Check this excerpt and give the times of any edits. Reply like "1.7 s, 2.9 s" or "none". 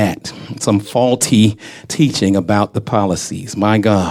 none